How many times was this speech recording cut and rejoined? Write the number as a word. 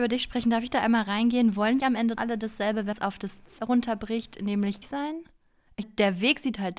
six